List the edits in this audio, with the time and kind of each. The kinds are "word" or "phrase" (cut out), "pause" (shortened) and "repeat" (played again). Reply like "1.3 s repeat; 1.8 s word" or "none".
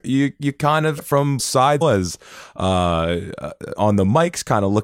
1.0 s word; 1.4 s word; 1.8 s word; 3.7 s word